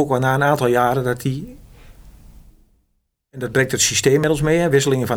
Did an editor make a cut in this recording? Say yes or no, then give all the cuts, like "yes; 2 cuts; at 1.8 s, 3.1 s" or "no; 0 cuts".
no; 0 cuts